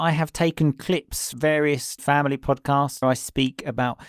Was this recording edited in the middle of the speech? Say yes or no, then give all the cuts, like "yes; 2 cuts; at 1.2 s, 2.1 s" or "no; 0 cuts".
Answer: yes; 3 cuts; at 1.3 s, 2.0 s, 3.0 s